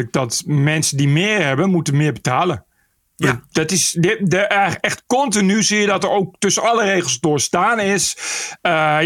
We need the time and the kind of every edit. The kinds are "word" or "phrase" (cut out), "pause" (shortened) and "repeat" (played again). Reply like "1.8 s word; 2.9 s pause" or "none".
none